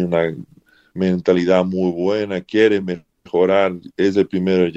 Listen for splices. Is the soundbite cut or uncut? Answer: uncut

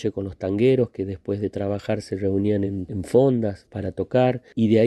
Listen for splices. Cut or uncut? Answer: uncut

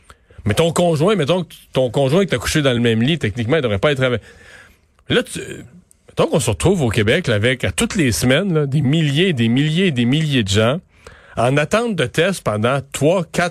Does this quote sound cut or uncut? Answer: uncut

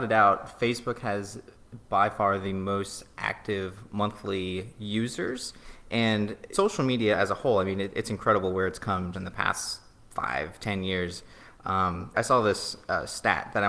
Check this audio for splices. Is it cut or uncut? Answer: cut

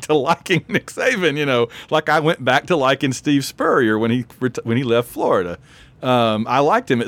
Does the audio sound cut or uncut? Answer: uncut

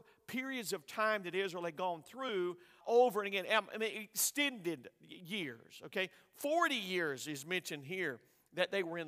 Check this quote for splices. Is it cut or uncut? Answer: cut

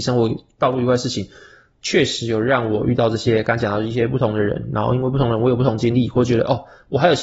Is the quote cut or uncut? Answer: uncut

